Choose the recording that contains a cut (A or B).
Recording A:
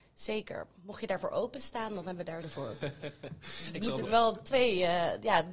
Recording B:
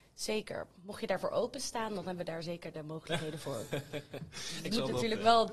A